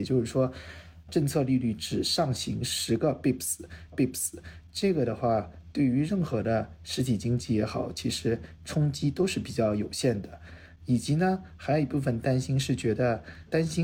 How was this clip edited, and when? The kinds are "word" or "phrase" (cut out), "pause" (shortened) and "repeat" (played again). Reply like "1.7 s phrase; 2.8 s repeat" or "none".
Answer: 3.9 s repeat